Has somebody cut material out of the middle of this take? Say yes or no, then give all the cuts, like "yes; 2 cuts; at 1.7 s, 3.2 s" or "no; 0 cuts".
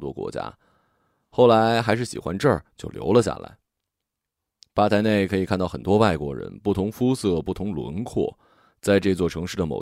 no; 0 cuts